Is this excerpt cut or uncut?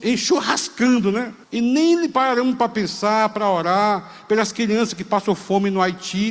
cut